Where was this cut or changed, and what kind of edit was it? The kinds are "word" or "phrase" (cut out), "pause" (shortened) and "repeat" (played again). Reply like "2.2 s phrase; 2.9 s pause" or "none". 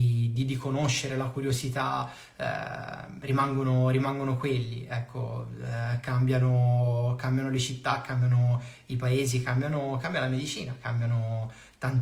none